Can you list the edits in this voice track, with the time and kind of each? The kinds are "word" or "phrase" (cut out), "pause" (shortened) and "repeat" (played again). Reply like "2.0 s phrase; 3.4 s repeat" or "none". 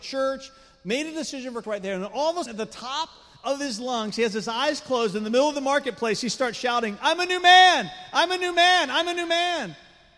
1.6 s word; 2.5 s word